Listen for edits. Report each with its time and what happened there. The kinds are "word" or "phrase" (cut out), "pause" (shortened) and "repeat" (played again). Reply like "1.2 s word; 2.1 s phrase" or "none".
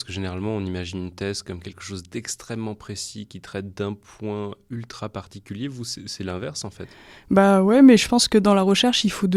none